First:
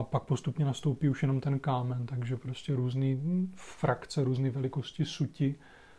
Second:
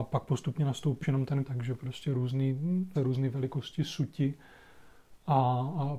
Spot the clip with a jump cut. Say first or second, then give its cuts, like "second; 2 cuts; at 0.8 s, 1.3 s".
second; 3 cuts; at 1.0 s, 1.5 s, 2.9 s